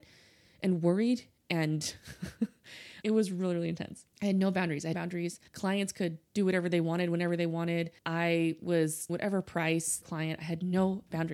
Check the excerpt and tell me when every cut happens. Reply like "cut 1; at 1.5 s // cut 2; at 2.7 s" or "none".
cut 1; at 3.0 s // cut 2; at 4.1 s // cut 3; at 4.9 s // cut 4; at 5.5 s // cut 5; at 8.0 s // cut 6; at 9.1 s // cut 7; at 10.0 s